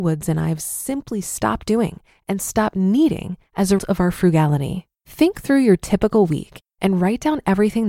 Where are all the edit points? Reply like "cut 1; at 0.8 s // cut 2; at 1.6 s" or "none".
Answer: cut 1; at 3.8 s // cut 2; at 4.9 s